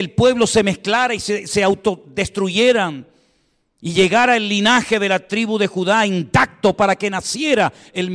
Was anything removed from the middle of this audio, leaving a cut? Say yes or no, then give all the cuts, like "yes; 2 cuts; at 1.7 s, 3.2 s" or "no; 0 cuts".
no; 0 cuts